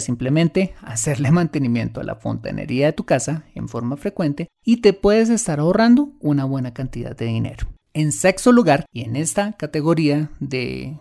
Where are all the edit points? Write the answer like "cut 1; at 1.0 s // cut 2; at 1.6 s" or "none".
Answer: cut 1; at 4.5 s // cut 2; at 7.8 s // cut 3; at 8.9 s